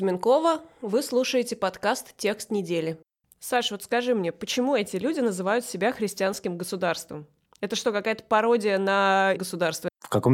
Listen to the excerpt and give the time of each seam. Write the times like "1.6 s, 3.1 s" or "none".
9.4 s